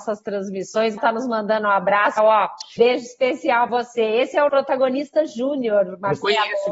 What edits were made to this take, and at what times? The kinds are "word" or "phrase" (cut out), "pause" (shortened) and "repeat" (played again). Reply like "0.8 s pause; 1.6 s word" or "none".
1.0 s word; 2.2 s word; 2.8 s word; 3.7 s word; 4.5 s word